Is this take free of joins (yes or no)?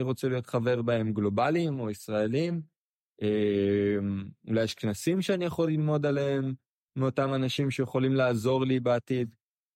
yes